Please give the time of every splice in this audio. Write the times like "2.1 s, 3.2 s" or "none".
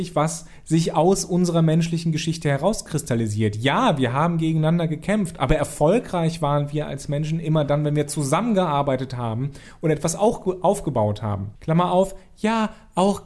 11.6 s